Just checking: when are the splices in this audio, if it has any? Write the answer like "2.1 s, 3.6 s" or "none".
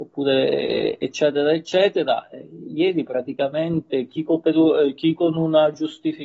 none